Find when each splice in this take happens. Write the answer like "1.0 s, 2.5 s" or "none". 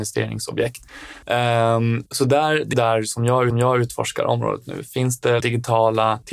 2.7 s, 3.5 s, 5.4 s